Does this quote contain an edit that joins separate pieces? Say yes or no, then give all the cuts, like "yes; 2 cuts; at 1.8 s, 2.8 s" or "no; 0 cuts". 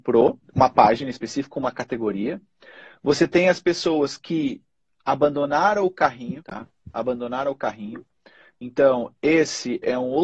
no; 0 cuts